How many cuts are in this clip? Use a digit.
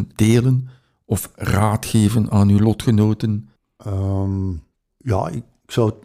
1